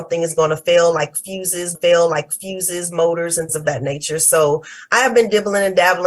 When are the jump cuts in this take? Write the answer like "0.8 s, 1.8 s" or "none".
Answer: 1.7 s, 3.5 s

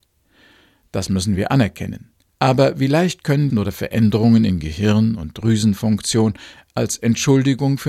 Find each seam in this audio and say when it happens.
2.3 s, 3.5 s

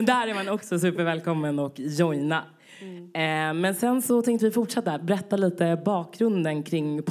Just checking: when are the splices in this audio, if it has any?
none

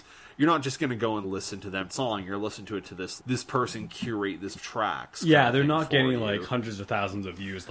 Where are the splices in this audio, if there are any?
1.2 s, 1.9 s, 2.8 s, 3.2 s, 4.6 s

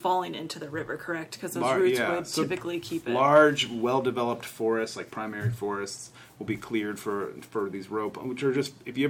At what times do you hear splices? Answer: none

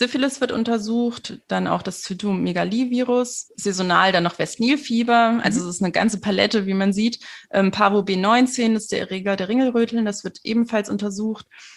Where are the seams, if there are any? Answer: 3.5 s

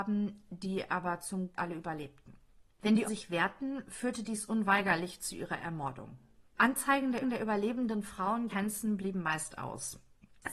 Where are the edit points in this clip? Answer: 1.6 s, 2.6 s, 3.0 s, 6.5 s, 7.2 s, 8.5 s

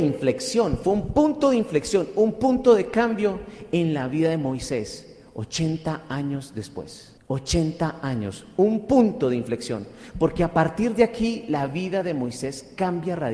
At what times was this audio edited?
7.2 s

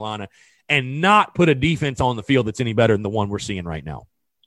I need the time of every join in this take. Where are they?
none

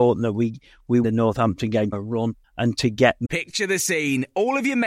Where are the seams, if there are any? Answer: 1.0 s, 1.9 s, 2.4 s

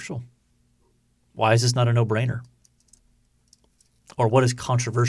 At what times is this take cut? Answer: none

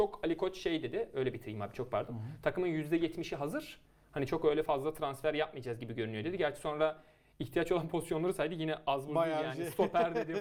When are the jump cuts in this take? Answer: none

